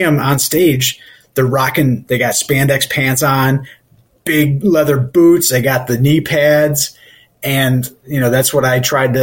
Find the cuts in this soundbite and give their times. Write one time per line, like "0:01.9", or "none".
none

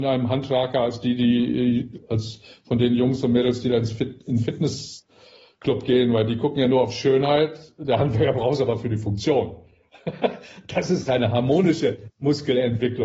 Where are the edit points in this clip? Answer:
none

